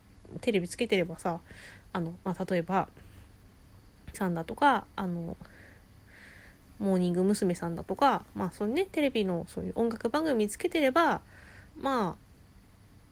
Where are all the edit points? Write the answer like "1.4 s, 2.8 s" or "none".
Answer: 4.1 s, 11.7 s